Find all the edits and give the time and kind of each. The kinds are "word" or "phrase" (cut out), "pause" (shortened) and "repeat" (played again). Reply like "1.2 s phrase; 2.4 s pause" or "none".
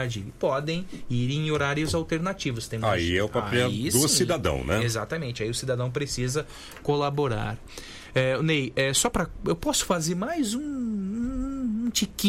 none